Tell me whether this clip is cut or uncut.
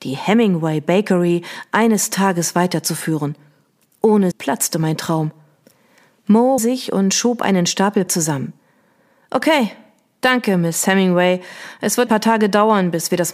cut